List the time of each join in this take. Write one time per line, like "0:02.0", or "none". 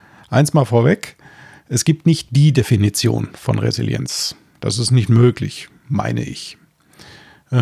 none